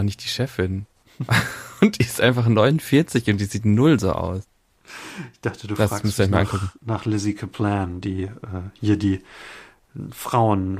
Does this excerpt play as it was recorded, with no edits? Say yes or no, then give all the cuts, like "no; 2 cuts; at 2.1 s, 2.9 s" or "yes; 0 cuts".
no; 1 cut; at 6.8 s